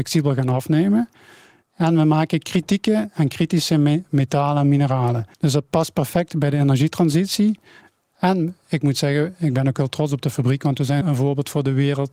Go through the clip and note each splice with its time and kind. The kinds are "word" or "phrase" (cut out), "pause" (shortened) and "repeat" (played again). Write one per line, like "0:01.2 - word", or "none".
0:05.3 - pause
0:11.0 - word